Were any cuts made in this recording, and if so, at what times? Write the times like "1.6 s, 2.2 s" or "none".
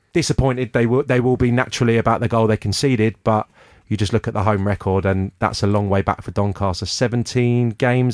none